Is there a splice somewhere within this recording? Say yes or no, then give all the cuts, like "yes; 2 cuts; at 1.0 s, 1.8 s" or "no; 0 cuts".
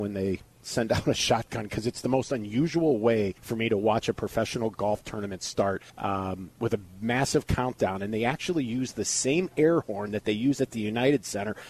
yes; 2 cuts; at 3.4 s, 5.9 s